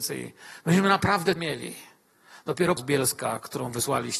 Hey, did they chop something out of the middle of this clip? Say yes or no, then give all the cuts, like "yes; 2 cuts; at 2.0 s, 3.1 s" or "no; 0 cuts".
yes; 2 cuts; at 1.4 s, 2.8 s